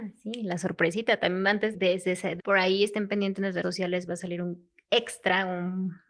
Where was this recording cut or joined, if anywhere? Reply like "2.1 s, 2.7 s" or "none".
1.7 s, 2.4 s, 3.6 s